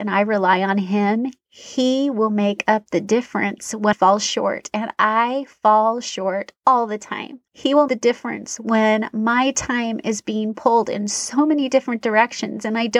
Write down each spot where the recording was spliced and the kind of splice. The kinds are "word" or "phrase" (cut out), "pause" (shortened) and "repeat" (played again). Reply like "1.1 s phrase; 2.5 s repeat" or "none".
3.9 s word; 6.6 s pause; 7.5 s pause; 7.9 s phrase